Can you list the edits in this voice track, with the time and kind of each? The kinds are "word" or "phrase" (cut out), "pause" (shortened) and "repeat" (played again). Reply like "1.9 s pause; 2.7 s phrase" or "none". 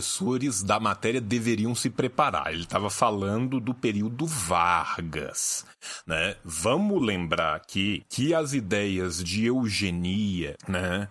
none